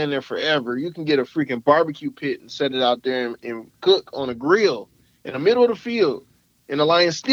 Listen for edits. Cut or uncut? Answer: uncut